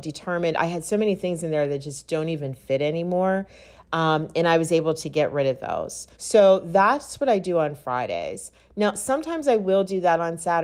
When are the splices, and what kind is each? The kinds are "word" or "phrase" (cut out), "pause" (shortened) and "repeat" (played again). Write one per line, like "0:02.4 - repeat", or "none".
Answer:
0:06.1 - pause